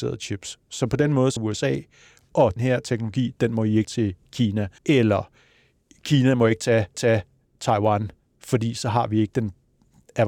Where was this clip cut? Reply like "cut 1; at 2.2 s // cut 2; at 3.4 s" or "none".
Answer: cut 1; at 1.4 s // cut 2; at 2.6 s // cut 3; at 3.8 s // cut 4; at 4.8 s // cut 5; at 6.9 s